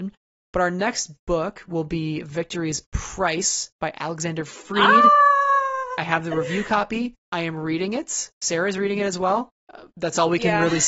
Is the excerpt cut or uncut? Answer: cut